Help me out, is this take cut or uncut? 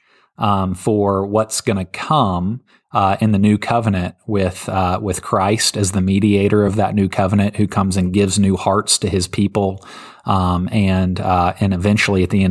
uncut